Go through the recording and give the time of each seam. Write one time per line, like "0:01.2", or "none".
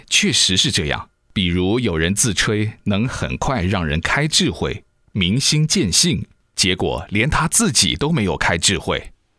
0:01.2